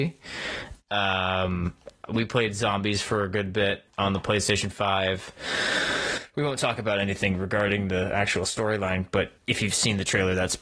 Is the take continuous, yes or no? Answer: no